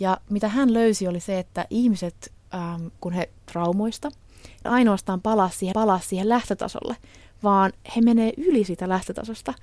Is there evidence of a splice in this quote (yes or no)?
yes